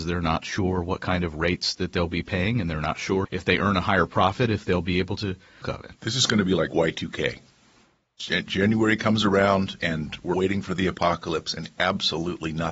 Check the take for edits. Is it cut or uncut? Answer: cut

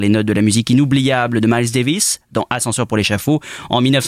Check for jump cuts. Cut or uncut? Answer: uncut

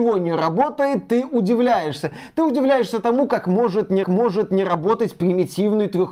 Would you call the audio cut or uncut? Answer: cut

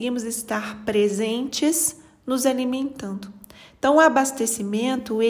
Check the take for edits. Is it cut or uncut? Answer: uncut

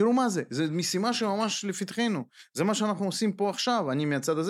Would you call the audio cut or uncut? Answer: uncut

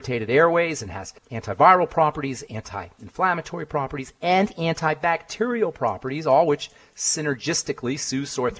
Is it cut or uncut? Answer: cut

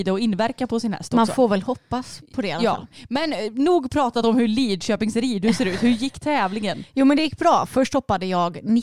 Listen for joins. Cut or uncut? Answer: uncut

